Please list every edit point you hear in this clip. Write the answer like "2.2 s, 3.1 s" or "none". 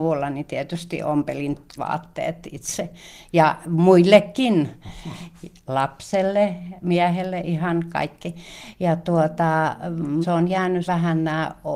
1.8 s, 10.2 s, 10.8 s